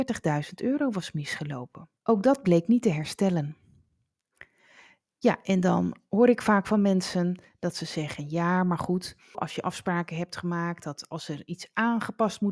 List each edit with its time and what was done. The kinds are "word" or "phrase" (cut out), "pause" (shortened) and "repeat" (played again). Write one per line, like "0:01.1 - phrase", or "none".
0:02.0 - pause
0:09.3 - phrase

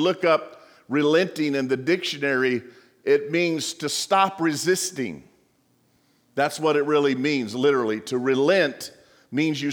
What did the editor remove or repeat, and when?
none

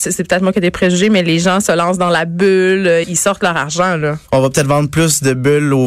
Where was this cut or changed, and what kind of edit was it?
0:03.0 - word

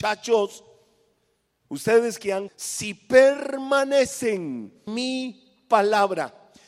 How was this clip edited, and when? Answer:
0:02.5 - word
0:04.9 - word

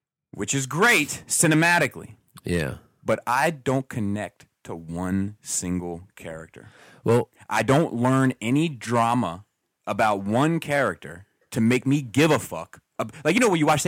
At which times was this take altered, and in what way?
none

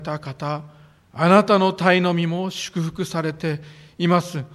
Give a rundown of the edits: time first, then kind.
0:01.0 - pause

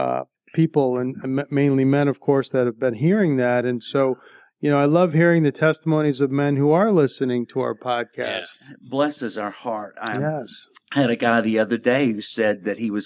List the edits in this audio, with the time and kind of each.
none

